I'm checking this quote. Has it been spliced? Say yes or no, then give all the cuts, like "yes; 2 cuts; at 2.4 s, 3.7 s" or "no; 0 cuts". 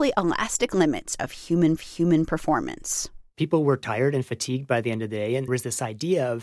yes; 2 cuts; at 1.8 s, 5.5 s